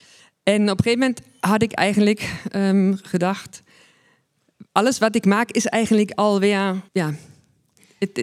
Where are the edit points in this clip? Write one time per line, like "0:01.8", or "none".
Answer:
0:04.7
0:06.9